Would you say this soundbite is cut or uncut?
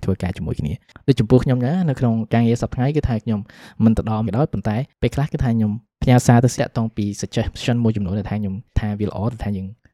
cut